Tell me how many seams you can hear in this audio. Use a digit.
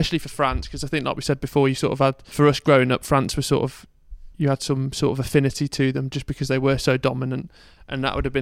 1